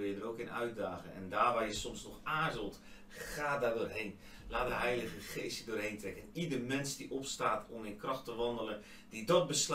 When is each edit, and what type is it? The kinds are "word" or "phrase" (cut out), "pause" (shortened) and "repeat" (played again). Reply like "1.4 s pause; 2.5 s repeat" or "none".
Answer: none

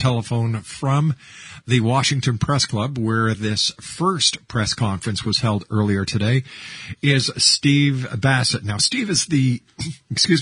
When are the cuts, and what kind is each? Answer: none

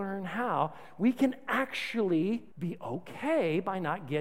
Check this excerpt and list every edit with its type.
2.5 s pause

